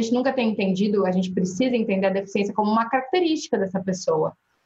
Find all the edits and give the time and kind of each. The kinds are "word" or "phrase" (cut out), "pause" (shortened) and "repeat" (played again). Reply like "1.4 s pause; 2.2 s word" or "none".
none